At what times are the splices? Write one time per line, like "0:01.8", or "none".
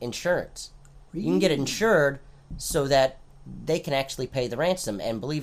none